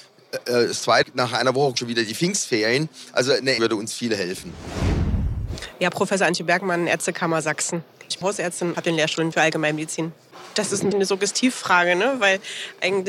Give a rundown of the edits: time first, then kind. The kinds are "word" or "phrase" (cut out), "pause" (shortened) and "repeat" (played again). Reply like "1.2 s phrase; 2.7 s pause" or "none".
1.0 s word; 1.7 s word; 3.6 s word; 8.2 s word; 8.7 s word; 9.3 s word; 10.9 s word